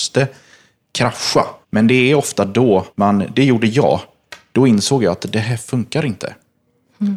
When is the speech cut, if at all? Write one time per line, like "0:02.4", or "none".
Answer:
0:01.6
0:02.9